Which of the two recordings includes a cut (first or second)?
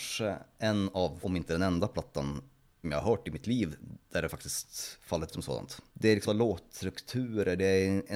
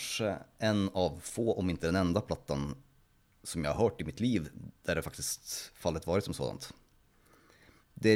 first